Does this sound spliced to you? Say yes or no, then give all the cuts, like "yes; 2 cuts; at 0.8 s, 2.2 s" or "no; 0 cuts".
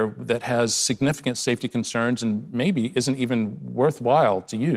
no; 0 cuts